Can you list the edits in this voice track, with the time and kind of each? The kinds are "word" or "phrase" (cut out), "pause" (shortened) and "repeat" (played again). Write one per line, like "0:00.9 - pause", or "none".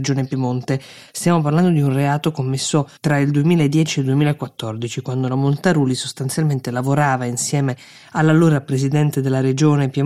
0:03.0 - pause